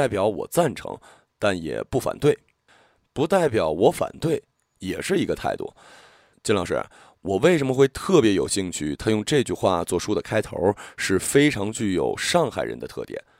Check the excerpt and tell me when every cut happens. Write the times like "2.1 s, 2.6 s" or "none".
none

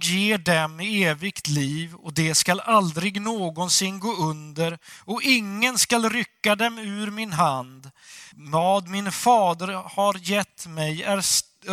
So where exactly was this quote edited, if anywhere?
8.3 s

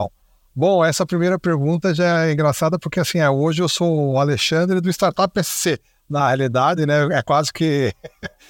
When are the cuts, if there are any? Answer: none

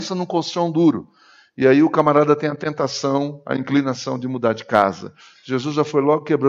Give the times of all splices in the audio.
none

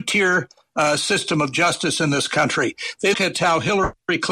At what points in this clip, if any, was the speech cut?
3.1 s

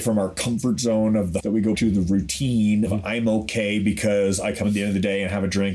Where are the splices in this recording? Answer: 1.4 s, 1.7 s, 2.9 s, 4.6 s

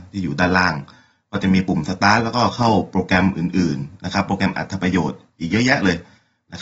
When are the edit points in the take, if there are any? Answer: none

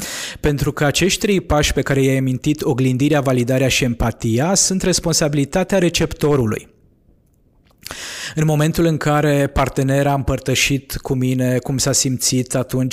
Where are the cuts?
none

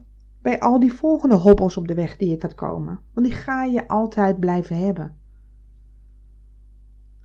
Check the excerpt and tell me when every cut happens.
2.4 s, 3.1 s

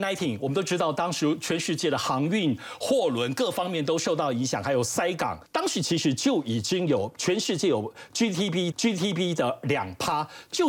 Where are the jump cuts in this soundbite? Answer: 5.5 s, 8.7 s

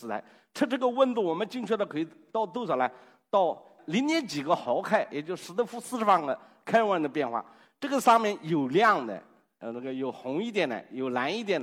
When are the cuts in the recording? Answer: none

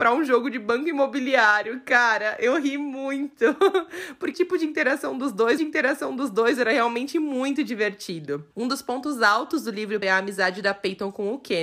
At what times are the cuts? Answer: 4.3 s, 5.6 s, 8.5 s, 10.0 s

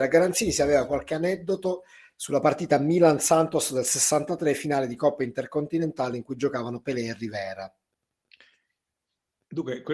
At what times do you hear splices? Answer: none

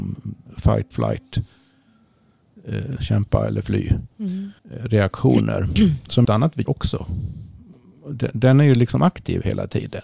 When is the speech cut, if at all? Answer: 0.9 s, 3.0 s, 4.6 s, 6.2 s, 6.7 s

